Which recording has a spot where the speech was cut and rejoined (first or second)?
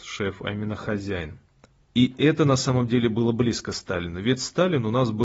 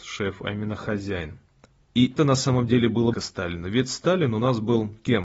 second